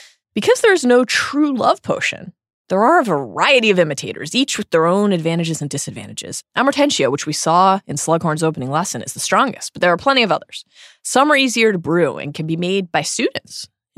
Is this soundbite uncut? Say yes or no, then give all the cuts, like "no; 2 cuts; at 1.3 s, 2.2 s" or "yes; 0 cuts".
no; 1 cut; at 6.5 s